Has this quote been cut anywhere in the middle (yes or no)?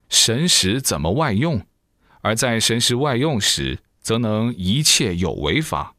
no